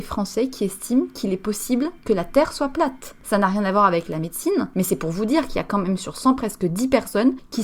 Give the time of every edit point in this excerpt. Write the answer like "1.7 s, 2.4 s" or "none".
6.4 s